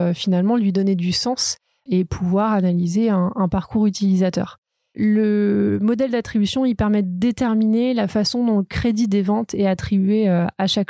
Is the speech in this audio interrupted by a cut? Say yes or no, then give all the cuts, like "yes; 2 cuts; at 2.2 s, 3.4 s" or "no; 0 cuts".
no; 0 cuts